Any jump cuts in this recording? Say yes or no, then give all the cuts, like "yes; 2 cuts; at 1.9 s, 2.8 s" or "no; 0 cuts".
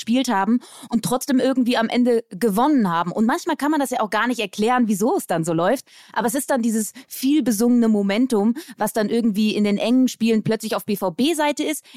no; 0 cuts